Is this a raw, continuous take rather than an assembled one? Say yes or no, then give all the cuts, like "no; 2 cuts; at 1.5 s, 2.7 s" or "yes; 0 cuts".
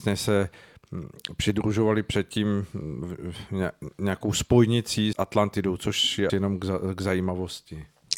no; 2 cuts; at 5.1 s, 6.3 s